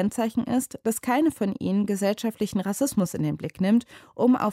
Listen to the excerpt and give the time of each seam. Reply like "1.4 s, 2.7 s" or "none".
none